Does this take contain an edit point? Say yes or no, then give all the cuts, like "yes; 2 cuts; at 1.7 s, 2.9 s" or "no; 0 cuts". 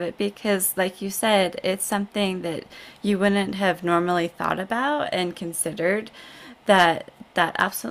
no; 0 cuts